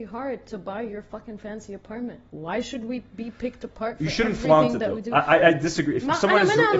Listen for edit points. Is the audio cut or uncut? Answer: cut